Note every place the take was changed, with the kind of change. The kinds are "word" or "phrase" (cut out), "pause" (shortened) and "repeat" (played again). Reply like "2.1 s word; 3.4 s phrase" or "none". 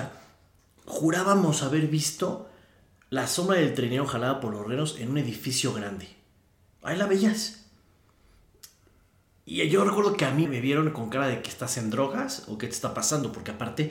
10.5 s word